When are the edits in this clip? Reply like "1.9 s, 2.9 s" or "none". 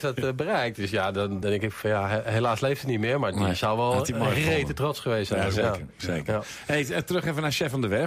1.4 s

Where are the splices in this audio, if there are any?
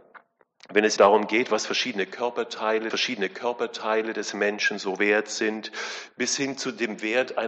1.0 s, 2.9 s

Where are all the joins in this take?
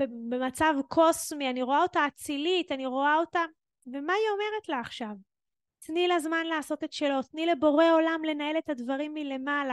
none

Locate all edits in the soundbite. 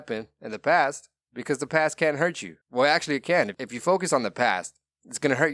2.6 s

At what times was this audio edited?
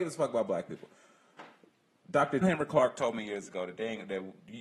2.4 s

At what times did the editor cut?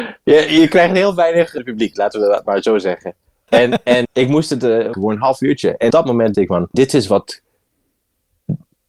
1.6 s, 3.5 s, 4.0 s, 4.9 s, 5.9 s, 6.3 s, 6.7 s

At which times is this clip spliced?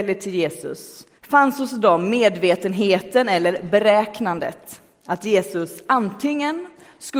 1.2 s

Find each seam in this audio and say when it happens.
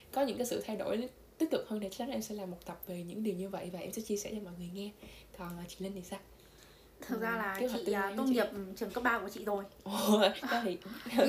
none

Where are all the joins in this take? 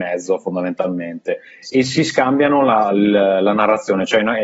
none

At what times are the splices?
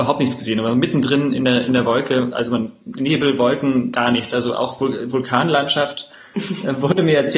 none

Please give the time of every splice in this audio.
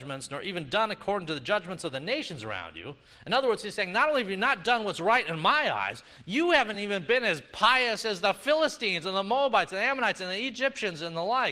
none

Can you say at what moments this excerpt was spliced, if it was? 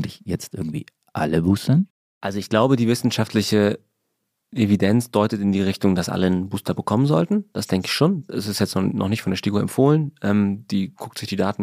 none

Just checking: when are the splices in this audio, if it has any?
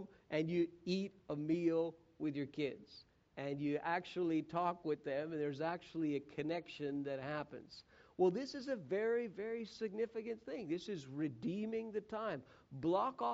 none

